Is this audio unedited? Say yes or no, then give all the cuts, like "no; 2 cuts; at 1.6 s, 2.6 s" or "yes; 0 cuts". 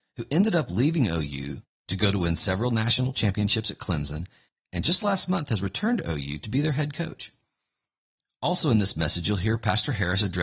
yes; 0 cuts